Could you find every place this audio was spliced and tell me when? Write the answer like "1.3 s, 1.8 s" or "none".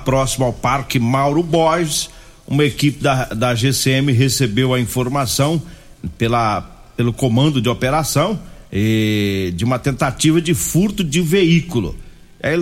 8.7 s